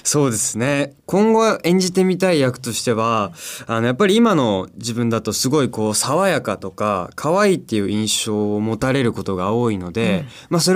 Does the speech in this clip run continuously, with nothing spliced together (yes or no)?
no